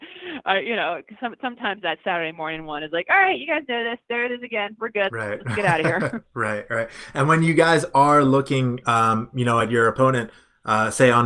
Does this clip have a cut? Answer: no; 0 cuts

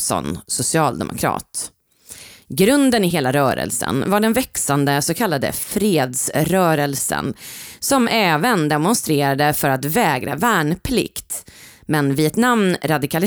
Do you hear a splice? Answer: no; 0 cuts

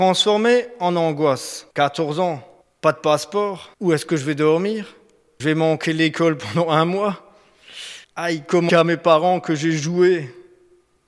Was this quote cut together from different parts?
yes; 6 cuts; at 1.7 s, 2.6 s, 3.7 s, 5.4 s, 8.0 s, 8.7 s

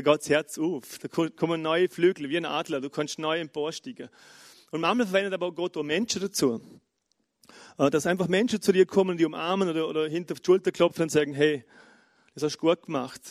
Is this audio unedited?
yes; 0 cuts

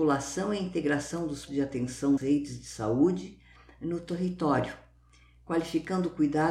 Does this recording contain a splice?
yes; 2 cuts; at 1.5 s, 2.2 s

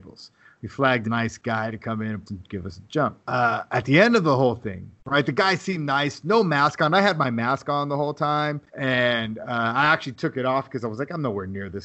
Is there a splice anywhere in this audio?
yes; 5 cuts; at 1.0 s, 2.3 s, 3.2 s, 5.0 s, 8.7 s

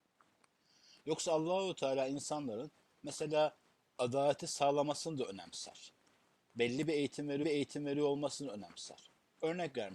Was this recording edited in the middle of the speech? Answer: yes; 1 cut; at 7.4 s

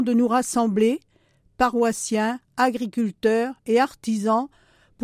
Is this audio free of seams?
yes; 0 cuts

